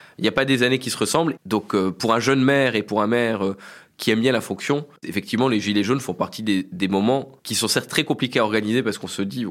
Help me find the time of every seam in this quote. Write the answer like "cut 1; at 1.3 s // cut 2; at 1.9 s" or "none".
cut 1; at 5.0 s // cut 2; at 7.4 s